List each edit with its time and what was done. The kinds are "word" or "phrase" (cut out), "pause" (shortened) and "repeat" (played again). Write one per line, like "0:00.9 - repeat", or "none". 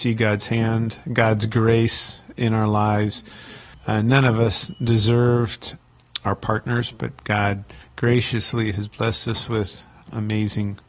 none